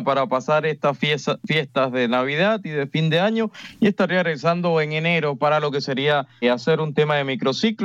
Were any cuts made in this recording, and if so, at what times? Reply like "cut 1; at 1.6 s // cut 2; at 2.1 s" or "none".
cut 1; at 6.4 s